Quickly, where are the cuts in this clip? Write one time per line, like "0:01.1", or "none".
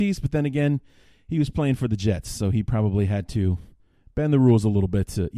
none